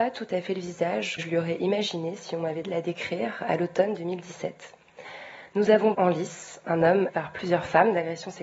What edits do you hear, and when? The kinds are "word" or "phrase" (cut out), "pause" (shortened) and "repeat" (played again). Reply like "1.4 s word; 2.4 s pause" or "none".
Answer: 1.2 s word; 2.6 s word; 5.9 s word; 7.1 s word